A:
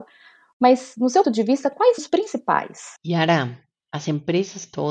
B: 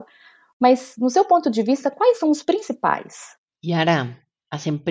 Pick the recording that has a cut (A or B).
A